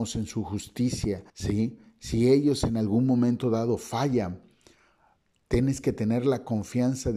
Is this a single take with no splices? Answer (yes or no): no